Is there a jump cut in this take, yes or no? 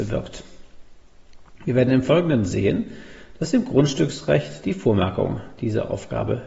no